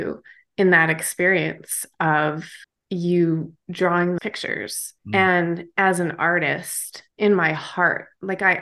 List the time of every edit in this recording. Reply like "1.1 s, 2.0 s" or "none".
2.6 s, 4.2 s, 5.0 s, 7.1 s